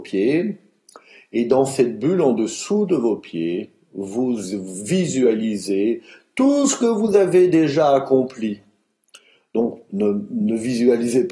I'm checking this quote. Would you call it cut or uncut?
uncut